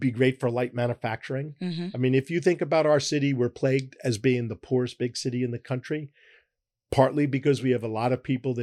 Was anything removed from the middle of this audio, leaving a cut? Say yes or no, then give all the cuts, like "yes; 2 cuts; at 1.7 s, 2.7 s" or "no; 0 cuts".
no; 0 cuts